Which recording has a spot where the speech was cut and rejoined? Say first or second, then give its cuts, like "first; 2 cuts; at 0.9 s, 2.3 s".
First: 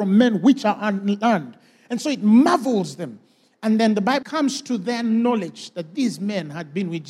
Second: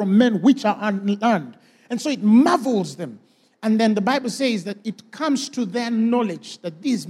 first; 1 cut; at 4.2 s